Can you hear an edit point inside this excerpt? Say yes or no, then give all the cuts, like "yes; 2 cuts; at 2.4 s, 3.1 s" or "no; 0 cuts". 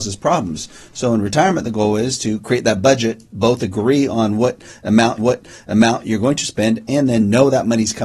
yes; 1 cut; at 5.2 s